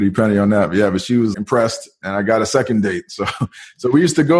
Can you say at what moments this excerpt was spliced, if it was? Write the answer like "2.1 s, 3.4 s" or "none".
1.3 s